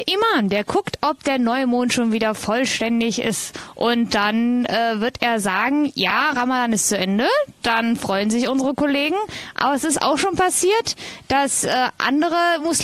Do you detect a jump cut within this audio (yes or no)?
no